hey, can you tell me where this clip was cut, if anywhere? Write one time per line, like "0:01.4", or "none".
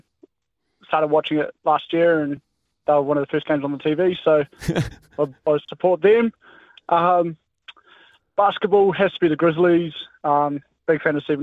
none